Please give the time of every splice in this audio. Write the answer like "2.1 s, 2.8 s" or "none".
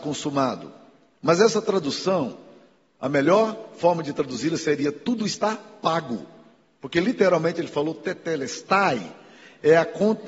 none